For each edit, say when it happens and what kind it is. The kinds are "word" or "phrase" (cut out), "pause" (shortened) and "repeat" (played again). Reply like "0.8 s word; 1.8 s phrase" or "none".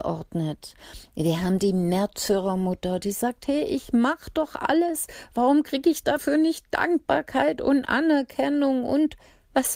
none